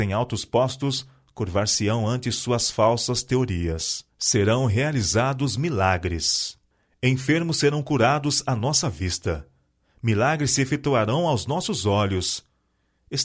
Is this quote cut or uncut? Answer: cut